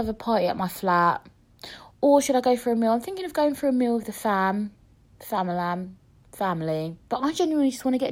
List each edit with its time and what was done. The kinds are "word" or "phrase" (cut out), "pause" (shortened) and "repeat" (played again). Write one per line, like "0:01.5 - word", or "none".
none

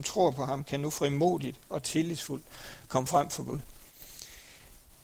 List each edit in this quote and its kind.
none

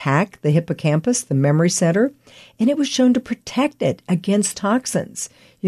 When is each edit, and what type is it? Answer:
0:04.5 - word

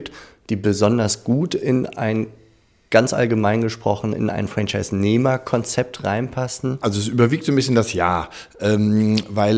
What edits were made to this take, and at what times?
none

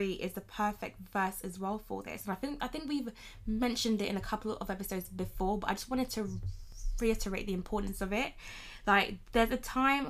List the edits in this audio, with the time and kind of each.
none

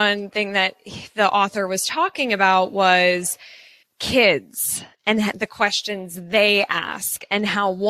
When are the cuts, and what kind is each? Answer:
none

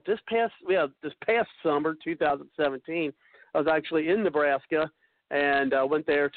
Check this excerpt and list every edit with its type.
none

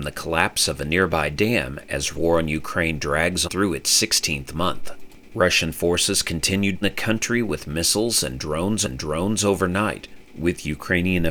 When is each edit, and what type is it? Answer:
0:02.1 - word
0:03.4 - word
0:06.8 - word
0:08.8 - repeat

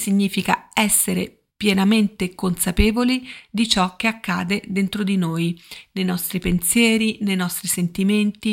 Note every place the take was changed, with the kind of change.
0:01.5 - pause

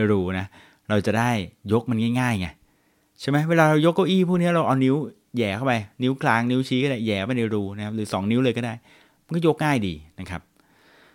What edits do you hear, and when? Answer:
none

